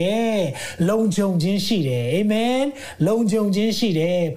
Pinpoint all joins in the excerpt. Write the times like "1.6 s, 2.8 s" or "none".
none